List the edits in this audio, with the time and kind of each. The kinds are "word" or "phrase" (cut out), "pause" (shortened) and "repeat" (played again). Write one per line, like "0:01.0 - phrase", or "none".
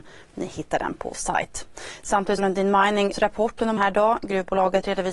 0:01.1 - word
0:02.4 - word
0:03.1 - word
0:03.8 - word